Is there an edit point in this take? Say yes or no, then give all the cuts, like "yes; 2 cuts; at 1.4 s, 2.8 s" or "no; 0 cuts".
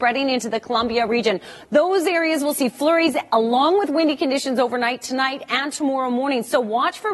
no; 0 cuts